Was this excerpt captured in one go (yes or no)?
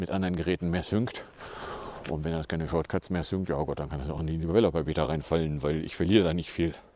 yes